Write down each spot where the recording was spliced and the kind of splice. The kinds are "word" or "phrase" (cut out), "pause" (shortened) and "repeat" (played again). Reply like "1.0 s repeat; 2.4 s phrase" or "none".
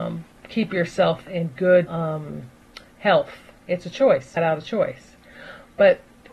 1.3 s word; 1.9 s word; 3.6 s pause; 4.4 s word